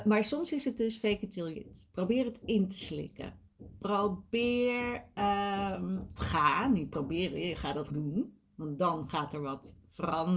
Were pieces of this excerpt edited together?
yes; 4 cuts; at 1.5 s, 6.2 s, 7.9 s, 8.4 s

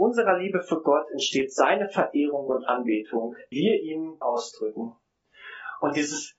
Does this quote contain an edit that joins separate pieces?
yes; 2 cuts; at 3.5 s, 4.2 s

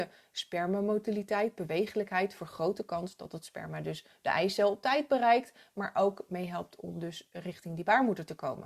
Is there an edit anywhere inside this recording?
no; 0 cuts

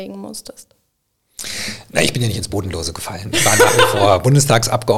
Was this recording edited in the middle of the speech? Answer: no; 0 cuts

